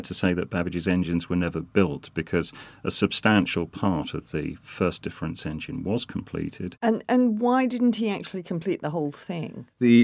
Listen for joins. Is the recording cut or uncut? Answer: uncut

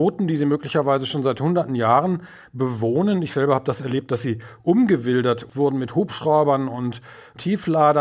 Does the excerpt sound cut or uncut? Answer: uncut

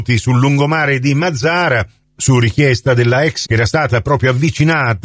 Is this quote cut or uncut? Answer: cut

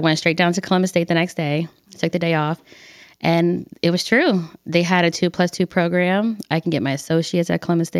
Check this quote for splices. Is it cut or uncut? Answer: uncut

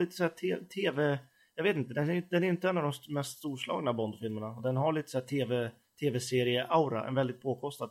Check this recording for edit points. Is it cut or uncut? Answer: uncut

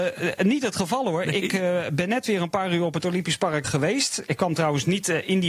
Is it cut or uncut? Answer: cut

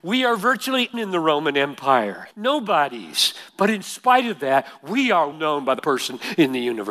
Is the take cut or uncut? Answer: cut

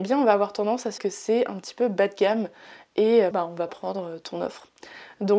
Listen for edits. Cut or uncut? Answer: cut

